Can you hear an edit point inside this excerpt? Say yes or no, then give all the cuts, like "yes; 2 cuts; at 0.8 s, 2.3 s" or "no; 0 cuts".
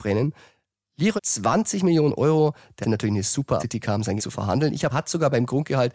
yes; 5 cuts; at 1.2 s, 2.8 s, 3.6 s, 4.2 s, 4.9 s